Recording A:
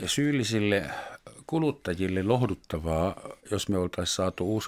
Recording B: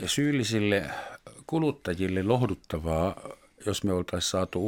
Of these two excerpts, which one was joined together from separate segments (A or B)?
A